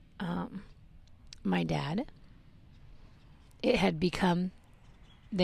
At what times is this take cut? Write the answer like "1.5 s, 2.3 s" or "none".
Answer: none

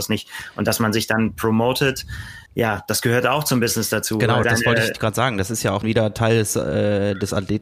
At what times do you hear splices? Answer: 2.5 s, 4.4 s, 4.9 s, 5.8 s

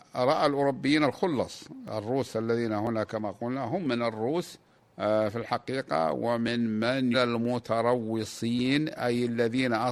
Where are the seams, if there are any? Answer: 4.8 s, 7.1 s

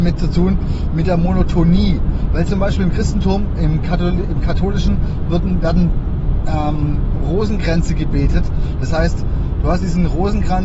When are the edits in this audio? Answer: none

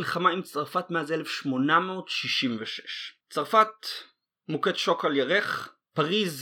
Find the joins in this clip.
none

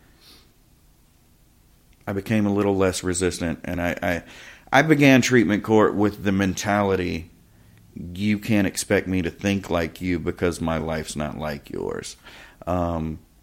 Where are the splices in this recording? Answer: none

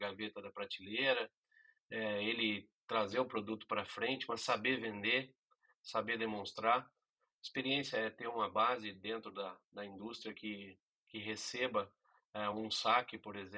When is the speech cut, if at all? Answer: none

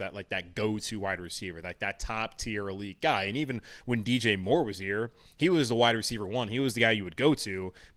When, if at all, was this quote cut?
none

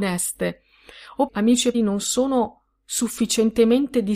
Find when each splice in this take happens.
1.3 s, 1.7 s

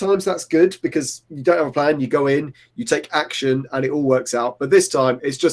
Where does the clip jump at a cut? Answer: none

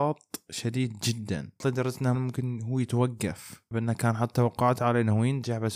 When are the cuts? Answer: 1.6 s, 2.1 s, 3.7 s

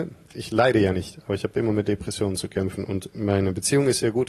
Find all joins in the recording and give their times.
none

